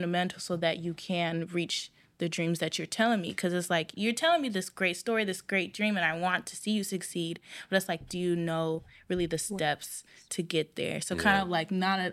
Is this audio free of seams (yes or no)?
yes